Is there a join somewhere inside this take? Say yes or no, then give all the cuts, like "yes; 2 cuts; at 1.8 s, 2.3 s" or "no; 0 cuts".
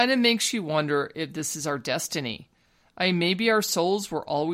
no; 0 cuts